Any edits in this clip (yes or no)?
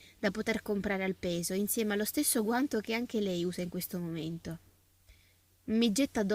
no